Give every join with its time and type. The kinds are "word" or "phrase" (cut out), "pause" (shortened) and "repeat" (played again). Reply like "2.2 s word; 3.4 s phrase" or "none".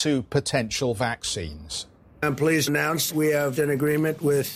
2.7 s word; 3.1 s word; 3.6 s word